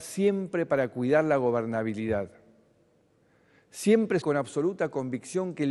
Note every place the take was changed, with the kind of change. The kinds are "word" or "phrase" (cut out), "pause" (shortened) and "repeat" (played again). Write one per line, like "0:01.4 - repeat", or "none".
0:04.2 - word